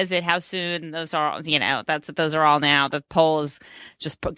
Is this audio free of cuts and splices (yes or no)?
yes